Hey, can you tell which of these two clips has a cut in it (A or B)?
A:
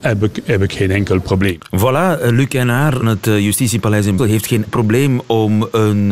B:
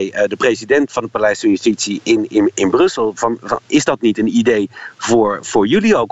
A